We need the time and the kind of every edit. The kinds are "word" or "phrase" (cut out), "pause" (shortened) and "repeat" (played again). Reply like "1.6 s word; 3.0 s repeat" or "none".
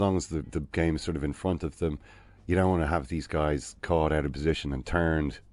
none